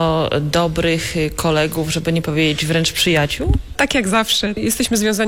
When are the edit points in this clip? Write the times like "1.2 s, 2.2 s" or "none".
none

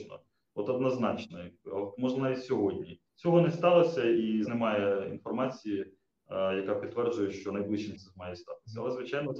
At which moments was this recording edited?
3.1 s, 4.4 s, 7.9 s

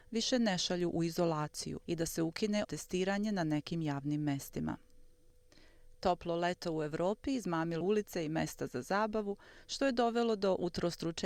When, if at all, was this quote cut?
1.8 s, 2.6 s, 7.8 s

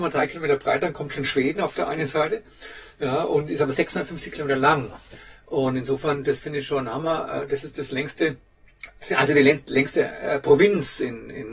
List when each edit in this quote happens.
none

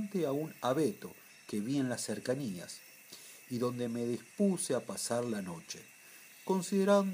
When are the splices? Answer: none

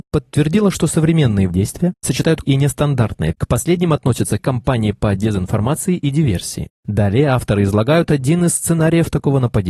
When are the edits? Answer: 1.5 s, 2.4 s, 3.3 s, 4.4 s

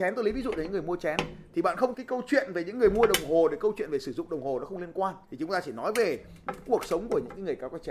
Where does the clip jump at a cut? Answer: 1.9 s, 5.2 s

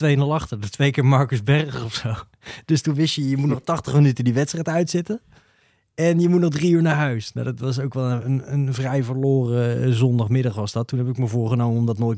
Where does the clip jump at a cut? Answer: none

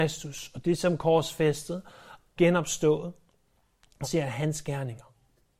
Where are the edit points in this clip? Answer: 2.4 s, 4.0 s

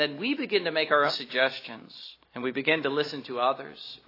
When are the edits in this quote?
1.1 s, 2.2 s

